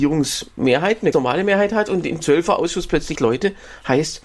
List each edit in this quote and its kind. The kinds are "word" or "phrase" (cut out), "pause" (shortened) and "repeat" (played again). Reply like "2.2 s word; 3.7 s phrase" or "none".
1.1 s word; 2.2 s word; 3.2 s word